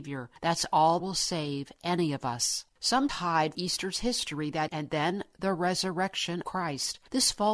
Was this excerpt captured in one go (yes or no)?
no